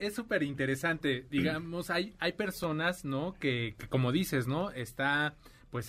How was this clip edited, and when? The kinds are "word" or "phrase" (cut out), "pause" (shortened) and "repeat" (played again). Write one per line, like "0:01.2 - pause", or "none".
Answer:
0:03.7 - word